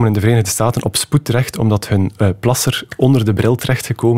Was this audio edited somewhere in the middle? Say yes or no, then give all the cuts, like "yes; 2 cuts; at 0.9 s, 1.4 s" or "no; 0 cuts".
no; 0 cuts